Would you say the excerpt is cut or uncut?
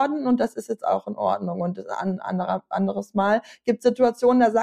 uncut